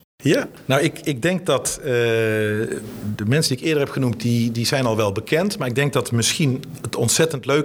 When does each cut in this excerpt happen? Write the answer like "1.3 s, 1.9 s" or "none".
4.2 s